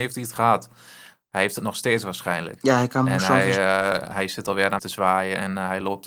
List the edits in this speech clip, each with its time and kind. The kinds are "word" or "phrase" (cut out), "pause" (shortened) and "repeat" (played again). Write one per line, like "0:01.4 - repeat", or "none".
0:04.8 - word